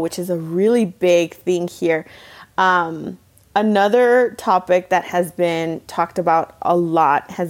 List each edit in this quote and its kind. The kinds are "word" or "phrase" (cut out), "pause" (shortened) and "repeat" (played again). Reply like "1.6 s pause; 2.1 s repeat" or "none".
none